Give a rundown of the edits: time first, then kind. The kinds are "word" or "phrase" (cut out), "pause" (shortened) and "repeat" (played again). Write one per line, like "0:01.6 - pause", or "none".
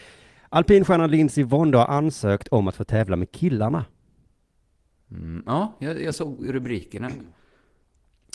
none